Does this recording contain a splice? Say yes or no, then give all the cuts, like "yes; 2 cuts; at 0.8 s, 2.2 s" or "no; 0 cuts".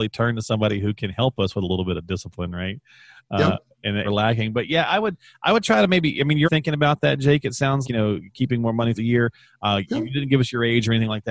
yes; 4 cuts; at 4.0 s, 6.4 s, 7.8 s, 8.9 s